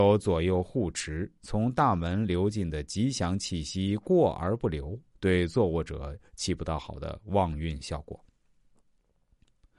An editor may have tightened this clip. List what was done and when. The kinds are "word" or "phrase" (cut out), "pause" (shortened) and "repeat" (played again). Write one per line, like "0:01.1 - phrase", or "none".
none